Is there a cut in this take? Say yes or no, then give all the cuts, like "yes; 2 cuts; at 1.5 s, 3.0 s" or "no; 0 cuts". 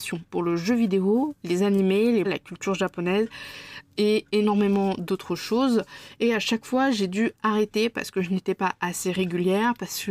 yes; 1 cut; at 2.2 s